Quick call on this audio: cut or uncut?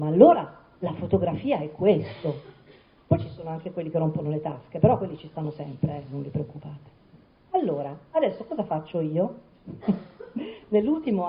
uncut